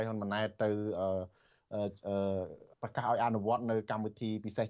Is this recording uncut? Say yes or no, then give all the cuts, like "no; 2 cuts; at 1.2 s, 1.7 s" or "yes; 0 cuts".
no; 1 cut; at 2.7 s